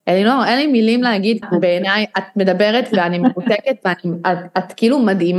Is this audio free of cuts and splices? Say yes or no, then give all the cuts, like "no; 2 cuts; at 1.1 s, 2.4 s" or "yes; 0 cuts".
no; 1 cut; at 1.4 s